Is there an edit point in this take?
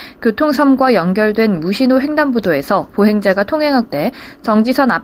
yes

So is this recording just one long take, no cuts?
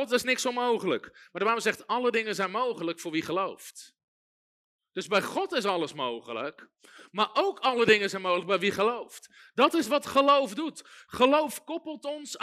yes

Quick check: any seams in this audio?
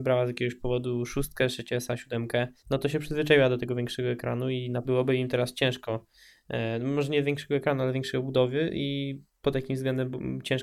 yes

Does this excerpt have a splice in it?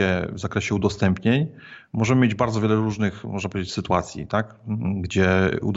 no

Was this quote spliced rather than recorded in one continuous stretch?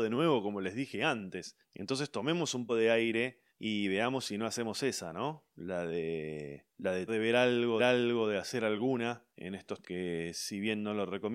yes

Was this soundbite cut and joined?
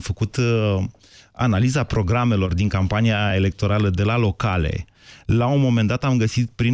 no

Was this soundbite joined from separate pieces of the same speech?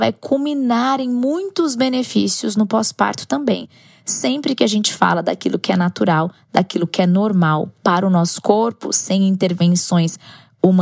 no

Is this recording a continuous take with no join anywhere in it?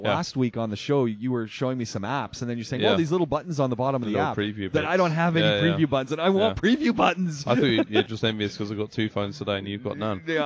yes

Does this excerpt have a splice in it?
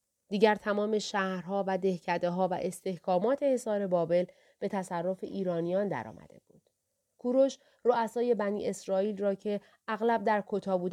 no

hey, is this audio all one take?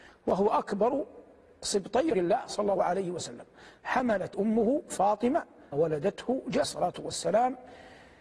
no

